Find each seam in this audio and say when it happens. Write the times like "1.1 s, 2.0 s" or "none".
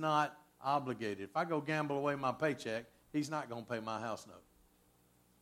none